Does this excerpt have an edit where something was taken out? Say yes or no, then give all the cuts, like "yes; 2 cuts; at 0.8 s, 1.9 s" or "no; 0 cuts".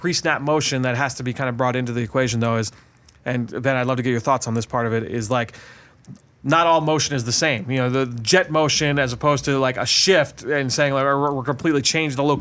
no; 0 cuts